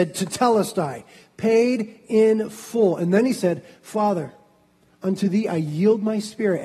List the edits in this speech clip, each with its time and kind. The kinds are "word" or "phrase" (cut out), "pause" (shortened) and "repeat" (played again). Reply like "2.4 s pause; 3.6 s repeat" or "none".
none